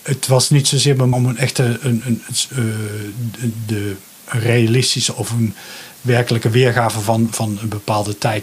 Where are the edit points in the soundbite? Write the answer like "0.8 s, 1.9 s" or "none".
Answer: 1.1 s, 2.0 s, 3.6 s, 7.3 s